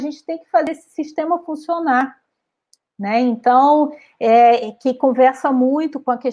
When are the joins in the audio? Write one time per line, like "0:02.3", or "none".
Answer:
none